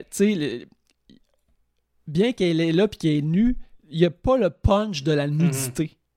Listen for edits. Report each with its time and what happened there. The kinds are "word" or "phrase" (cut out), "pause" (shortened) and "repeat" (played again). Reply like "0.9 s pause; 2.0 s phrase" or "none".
3.8 s pause